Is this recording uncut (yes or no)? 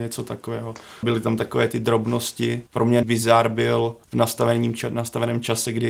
no